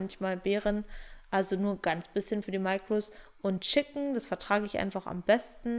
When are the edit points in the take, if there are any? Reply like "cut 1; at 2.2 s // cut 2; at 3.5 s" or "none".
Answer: none